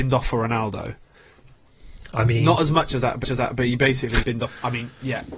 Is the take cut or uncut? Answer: cut